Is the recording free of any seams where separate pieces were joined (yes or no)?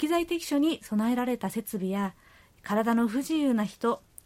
yes